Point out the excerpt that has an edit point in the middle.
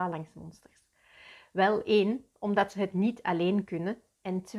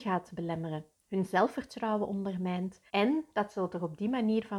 second; 1 cut; at 2.9 s

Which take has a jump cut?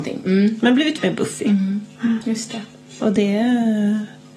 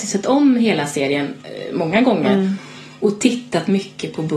first; 1 cut; at 1.0 s

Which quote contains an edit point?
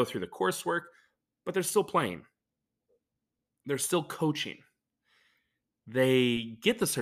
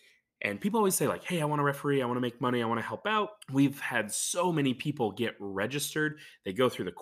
second; 1 cut; at 3.4 s

